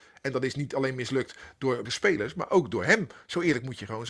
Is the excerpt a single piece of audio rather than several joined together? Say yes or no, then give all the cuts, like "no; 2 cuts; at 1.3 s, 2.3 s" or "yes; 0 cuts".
no; 1 cut; at 1.9 s